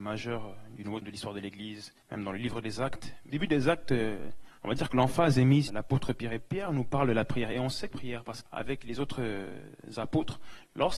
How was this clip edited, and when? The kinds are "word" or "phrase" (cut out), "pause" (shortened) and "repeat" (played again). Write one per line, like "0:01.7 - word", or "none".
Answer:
0:01.0 - word
0:02.0 - pause
0:03.3 - word
0:04.6 - pause
0:05.7 - word
0:07.9 - phrase
0:08.5 - phrase